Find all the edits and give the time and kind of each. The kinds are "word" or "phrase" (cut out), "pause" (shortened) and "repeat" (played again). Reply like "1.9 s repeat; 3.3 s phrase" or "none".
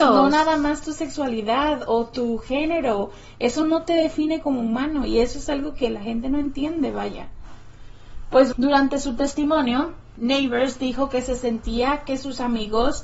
8.5 s word